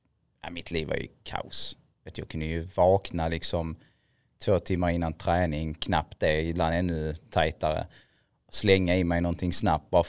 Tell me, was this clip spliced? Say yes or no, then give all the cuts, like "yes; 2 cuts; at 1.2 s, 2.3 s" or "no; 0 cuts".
no; 0 cuts